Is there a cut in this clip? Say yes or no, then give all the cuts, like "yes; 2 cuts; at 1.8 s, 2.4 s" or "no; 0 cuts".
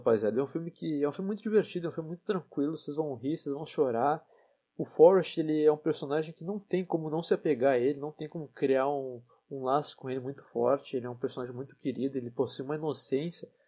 no; 0 cuts